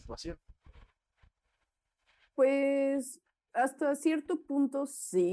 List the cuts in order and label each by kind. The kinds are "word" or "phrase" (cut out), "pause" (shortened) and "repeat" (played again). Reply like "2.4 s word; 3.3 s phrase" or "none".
none